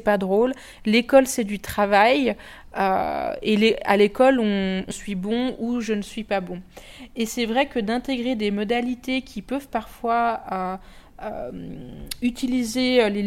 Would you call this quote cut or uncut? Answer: cut